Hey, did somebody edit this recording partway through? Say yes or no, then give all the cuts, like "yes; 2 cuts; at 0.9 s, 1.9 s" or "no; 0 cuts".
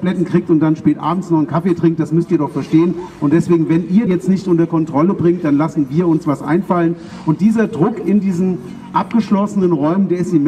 yes; 1 cut; at 4.1 s